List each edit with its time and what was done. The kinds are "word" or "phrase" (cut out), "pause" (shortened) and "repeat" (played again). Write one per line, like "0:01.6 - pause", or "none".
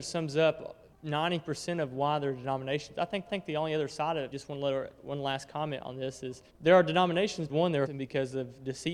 0:00.9 - pause
0:03.3 - repeat
0:04.3 - word
0:06.5 - pause
0:07.5 - word
0:07.9 - phrase